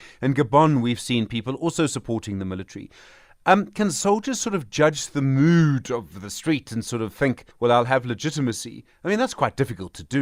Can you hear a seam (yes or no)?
yes